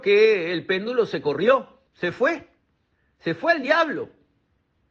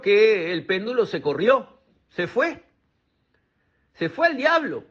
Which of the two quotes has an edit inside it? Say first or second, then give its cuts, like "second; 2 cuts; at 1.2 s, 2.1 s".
first; 2 cuts; at 1.9 s, 2.9 s